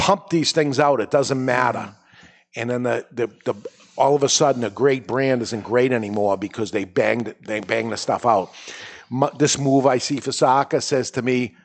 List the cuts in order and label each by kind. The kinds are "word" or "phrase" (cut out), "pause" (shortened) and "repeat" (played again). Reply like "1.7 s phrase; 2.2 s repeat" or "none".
none